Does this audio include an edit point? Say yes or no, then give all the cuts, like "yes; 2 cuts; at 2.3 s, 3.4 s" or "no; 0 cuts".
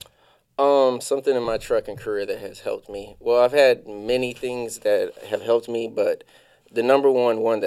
no; 0 cuts